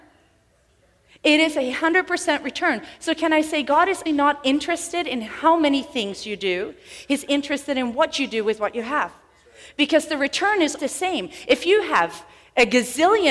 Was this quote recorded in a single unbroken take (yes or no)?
no